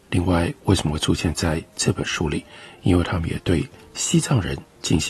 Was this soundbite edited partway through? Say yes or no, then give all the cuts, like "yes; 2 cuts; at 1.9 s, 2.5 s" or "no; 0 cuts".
no; 0 cuts